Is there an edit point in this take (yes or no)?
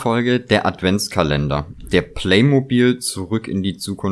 no